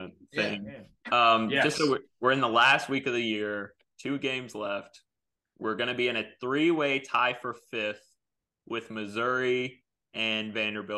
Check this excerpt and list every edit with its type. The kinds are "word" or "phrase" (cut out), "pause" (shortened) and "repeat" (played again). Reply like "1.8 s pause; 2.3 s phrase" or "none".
none